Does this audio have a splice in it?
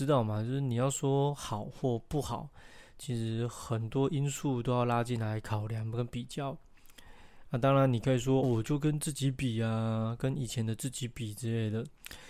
yes; 1 cut; at 8.4 s

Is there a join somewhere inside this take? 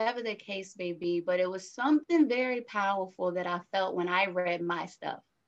no; 0 cuts

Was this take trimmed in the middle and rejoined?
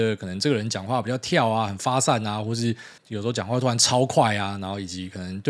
yes; 1 cut; at 3.0 s

